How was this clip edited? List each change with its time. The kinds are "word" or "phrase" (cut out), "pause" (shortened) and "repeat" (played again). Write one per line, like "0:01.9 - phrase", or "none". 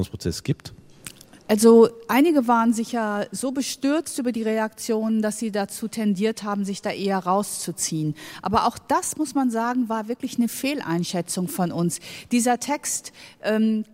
0:01.4 - pause